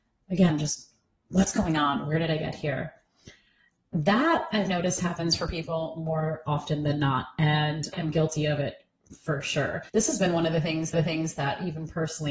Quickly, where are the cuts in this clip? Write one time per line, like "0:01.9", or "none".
0:07.9
0:09.9
0:10.9